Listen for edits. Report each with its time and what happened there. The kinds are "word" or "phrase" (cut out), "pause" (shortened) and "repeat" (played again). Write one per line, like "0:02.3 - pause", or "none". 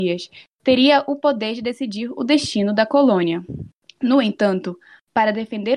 0:03.8 - pause